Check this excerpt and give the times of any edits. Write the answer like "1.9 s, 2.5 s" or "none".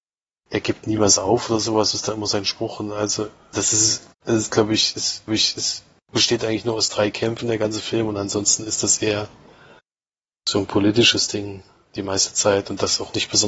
3.5 s, 4.1 s, 5.3 s